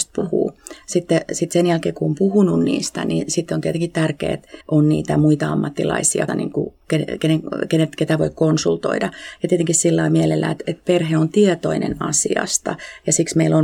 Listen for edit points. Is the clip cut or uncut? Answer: cut